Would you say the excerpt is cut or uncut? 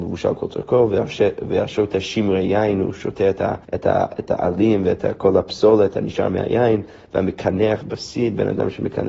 cut